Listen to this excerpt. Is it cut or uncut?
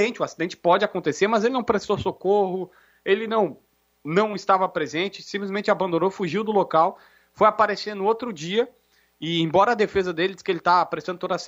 uncut